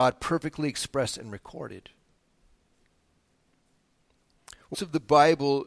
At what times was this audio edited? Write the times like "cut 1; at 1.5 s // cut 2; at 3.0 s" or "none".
cut 1; at 4.7 s